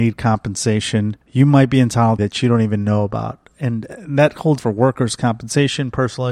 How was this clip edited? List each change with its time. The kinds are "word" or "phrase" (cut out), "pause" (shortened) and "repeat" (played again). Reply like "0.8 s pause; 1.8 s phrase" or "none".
1.2 s pause; 2.2 s phrase; 4.6 s word